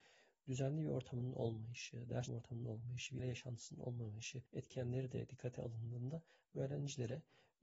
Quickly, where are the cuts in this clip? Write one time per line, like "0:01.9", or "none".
0:02.3
0:03.2
0:04.5